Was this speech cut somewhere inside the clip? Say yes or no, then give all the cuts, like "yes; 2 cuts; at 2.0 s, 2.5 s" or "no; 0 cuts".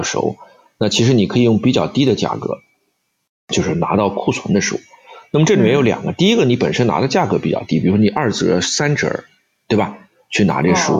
no; 0 cuts